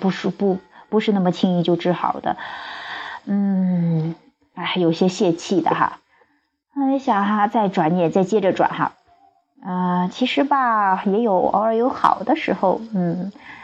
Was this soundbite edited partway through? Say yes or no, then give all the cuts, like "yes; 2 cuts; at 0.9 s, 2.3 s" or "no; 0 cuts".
no; 0 cuts